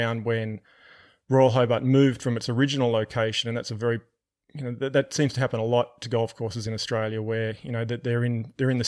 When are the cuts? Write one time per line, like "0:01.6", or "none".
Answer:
none